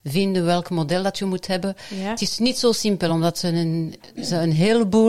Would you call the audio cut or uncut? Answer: uncut